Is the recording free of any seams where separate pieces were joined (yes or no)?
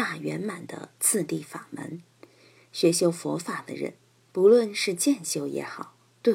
yes